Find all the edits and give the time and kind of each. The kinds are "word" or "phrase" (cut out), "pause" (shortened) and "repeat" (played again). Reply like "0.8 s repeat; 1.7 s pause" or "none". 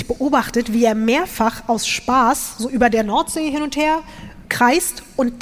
none